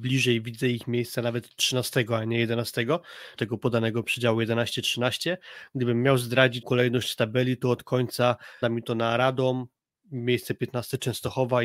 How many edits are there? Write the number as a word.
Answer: three